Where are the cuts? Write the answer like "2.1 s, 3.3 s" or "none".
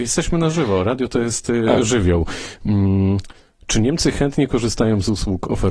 none